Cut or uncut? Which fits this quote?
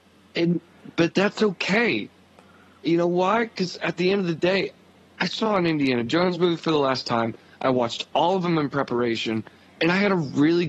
uncut